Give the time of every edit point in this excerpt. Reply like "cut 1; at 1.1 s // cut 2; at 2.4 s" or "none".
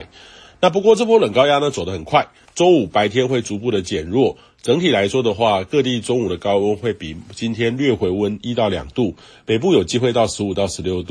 cut 1; at 2.4 s